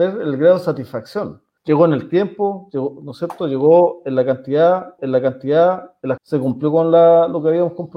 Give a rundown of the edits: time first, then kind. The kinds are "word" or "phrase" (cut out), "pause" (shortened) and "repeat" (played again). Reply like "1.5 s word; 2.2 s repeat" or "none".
1.6 s pause; 5.0 s repeat; 6.2 s word